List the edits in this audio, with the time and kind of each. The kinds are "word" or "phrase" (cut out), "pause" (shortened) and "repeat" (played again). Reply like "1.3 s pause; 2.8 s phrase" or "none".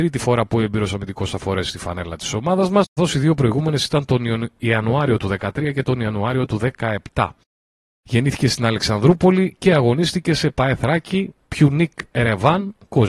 3.0 s word

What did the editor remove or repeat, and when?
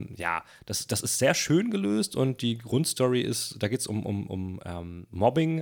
none

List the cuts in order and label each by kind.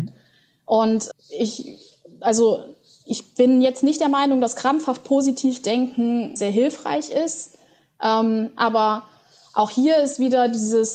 1.1 s word; 6.4 s word

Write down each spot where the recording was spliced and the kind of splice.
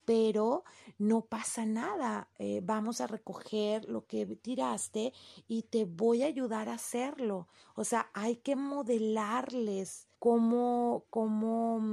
10.1 s pause

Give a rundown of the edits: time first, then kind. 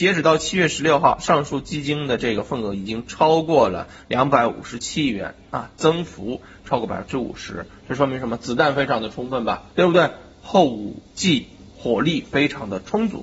9.7 s pause; 11.0 s pause

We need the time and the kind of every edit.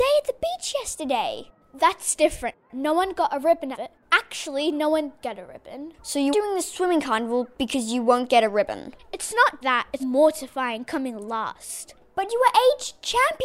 3.7 s phrase; 5.2 s word; 6.3 s word; 9.6 s word; 10.0 s word

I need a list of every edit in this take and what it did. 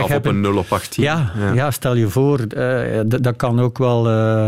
none

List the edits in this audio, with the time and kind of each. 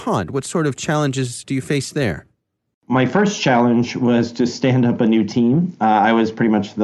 none

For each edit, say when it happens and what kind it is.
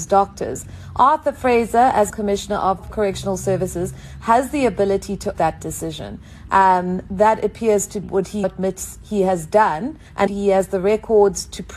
2.1 s word; 5.3 s word; 7.1 s word; 8.0 s word; 8.4 s word; 10.3 s word

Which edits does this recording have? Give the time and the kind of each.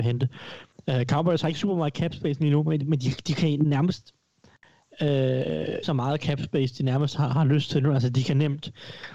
5.8 s word

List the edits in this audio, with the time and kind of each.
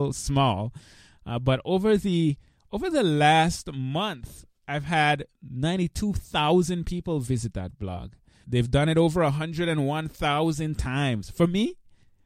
8.4 s word

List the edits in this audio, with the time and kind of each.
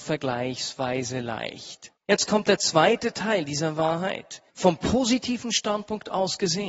2.0 s pause; 4.5 s pause

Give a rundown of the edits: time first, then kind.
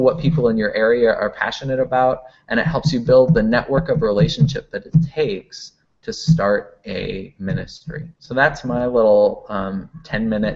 8.1 s pause

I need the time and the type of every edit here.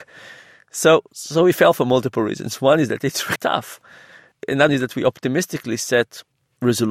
1.1 s pause; 3.4 s word; 4.7 s word

